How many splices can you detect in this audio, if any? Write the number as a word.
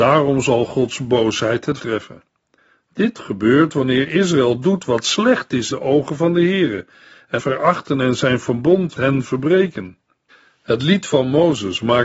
four